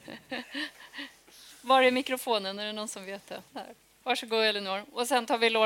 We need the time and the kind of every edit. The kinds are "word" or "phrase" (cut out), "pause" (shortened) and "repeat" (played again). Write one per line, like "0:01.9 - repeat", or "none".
0:03.5 - pause